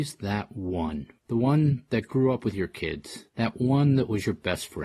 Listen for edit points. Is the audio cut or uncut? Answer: cut